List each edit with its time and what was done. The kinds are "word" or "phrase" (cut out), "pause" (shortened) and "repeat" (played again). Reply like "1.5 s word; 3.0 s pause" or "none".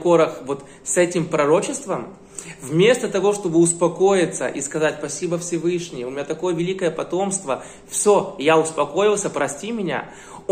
none

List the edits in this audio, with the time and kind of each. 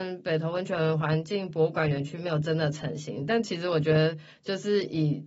none

